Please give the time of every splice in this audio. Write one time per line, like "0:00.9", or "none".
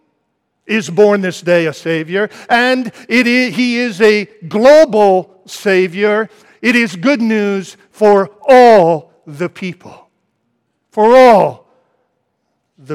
none